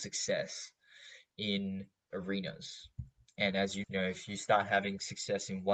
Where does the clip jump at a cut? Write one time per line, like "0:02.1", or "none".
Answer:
0:02.1
0:03.8